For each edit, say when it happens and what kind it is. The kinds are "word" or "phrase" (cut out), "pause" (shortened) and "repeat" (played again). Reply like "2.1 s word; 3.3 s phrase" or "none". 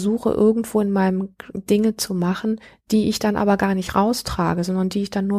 1.5 s phrase